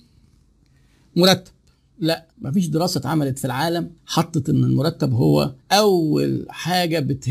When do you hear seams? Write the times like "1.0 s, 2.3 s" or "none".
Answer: 2.3 s, 4.0 s, 5.6 s